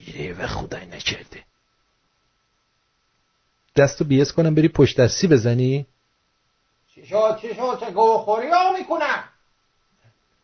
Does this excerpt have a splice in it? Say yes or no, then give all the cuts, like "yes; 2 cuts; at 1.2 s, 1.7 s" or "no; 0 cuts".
no; 0 cuts